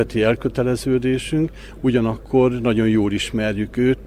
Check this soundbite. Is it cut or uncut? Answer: uncut